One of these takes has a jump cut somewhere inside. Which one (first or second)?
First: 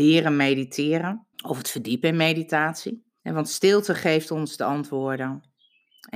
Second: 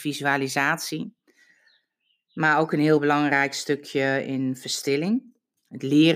first